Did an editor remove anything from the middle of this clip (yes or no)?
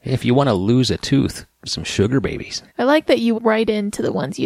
yes